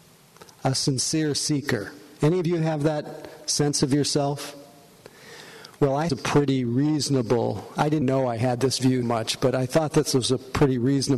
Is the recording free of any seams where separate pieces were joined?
no; 3 cuts; at 6.1 s, 8.0 s, 9.0 s

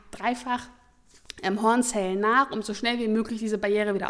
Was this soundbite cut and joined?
no; 0 cuts

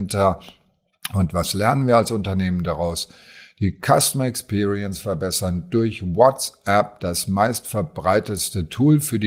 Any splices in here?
no; 0 cuts

